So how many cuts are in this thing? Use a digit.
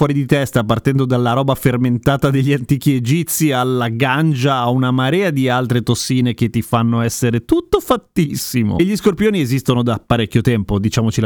0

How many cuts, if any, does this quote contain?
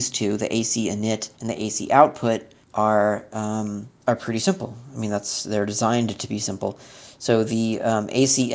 3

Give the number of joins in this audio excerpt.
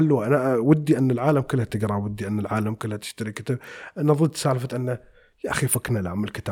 0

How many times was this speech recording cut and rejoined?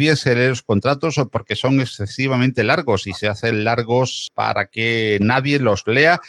0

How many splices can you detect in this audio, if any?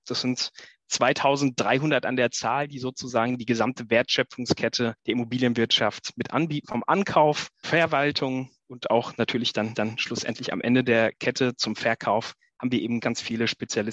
5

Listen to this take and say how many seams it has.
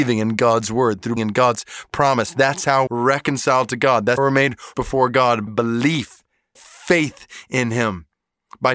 6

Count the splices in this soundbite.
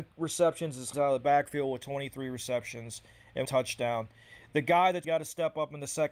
3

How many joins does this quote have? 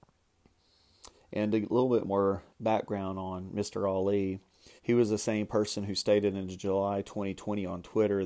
2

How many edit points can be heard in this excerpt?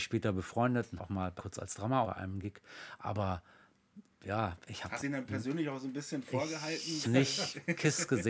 6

